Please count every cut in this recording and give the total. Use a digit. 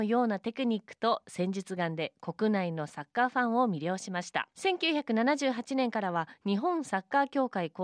1